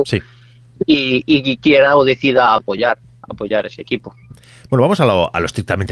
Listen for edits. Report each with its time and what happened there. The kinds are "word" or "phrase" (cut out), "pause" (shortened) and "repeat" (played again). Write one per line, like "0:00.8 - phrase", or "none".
none